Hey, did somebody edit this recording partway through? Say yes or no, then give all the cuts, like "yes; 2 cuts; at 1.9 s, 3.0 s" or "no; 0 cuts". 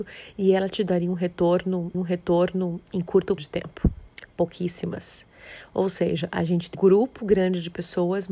yes; 3 cuts; at 1.9 s, 3.4 s, 6.7 s